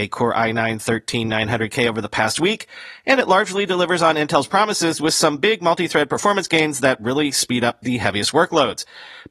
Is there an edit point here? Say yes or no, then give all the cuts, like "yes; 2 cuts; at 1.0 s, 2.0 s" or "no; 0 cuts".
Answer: no; 0 cuts